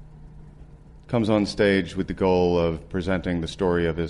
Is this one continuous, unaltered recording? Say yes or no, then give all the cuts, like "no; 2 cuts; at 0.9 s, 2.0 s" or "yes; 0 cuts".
yes; 0 cuts